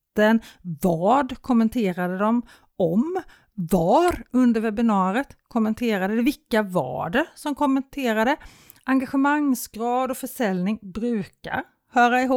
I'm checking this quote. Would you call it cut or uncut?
uncut